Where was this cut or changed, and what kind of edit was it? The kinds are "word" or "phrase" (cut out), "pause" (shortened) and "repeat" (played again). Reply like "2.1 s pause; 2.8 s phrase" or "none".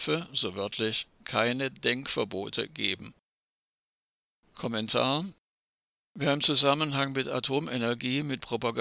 3.5 s pause